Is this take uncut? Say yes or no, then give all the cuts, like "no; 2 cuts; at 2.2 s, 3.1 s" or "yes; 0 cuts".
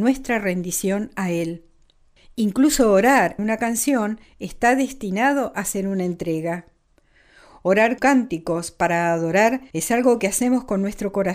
no; 4 cuts; at 2.2 s, 3.4 s, 8.0 s, 9.7 s